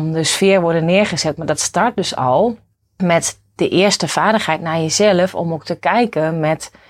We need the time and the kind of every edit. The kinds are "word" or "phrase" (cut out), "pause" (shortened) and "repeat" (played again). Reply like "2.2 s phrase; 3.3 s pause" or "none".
none